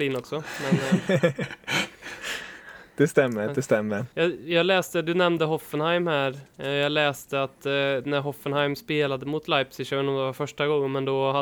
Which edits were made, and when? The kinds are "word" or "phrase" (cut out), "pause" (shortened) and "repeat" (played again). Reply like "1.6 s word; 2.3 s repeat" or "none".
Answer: 4.1 s pause